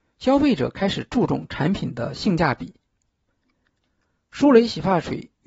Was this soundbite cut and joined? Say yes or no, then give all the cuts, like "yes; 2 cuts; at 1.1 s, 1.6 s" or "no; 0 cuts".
no; 0 cuts